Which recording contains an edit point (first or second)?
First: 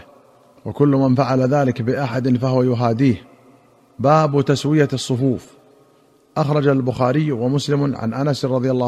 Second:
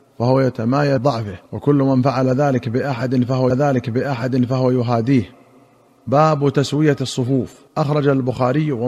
second